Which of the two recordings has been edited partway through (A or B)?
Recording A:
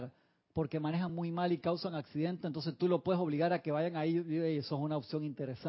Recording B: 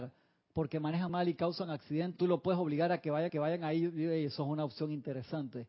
B